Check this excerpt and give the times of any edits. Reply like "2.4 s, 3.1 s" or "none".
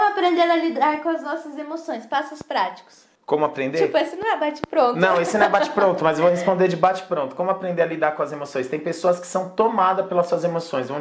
3.2 s